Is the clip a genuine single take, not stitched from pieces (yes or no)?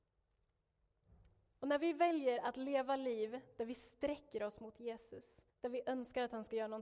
no